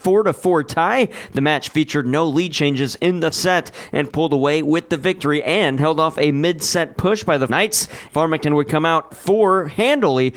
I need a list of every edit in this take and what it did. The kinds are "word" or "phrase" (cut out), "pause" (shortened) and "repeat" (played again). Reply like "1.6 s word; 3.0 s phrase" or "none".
3.3 s word; 4.1 s word; 7.5 s word; 9.1 s phrase